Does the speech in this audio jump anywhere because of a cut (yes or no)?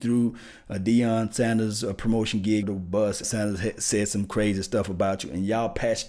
yes